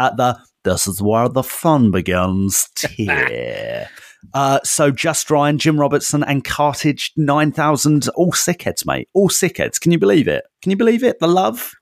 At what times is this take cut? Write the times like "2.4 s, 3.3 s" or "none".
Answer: 8.1 s, 10.5 s